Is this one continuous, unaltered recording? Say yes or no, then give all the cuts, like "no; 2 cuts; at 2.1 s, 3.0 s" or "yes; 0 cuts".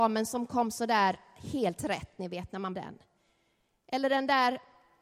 no; 1 cut; at 2.7 s